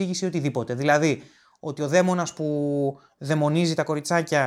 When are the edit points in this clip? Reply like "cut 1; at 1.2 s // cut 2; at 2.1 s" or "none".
none

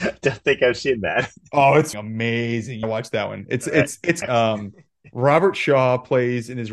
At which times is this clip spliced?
cut 1; at 1.9 s // cut 2; at 2.8 s // cut 3; at 4.2 s

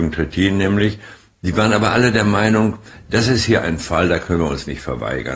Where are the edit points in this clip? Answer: none

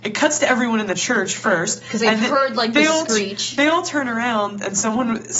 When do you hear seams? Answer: none

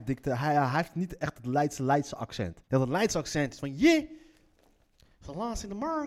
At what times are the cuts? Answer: cut 1; at 2.6 s

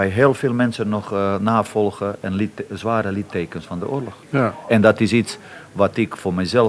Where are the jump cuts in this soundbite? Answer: cut 1; at 4.2 s

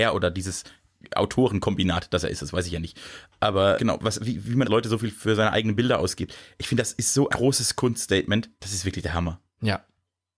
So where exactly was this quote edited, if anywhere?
cut 1; at 3.7 s // cut 2; at 4.6 s // cut 3; at 7.3 s // cut 4; at 8.5 s

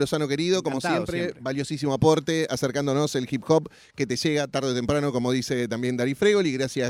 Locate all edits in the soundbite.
none

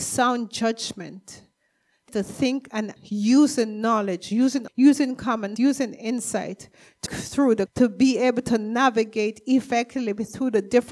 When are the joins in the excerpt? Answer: cut 1; at 2.1 s // cut 2; at 3.0 s // cut 3; at 4.7 s // cut 4; at 5.6 s // cut 5; at 7.1 s // cut 6; at 7.7 s

